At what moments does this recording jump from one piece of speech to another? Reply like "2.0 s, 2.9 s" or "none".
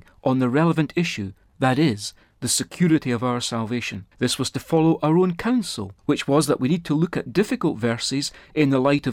4.1 s, 6.0 s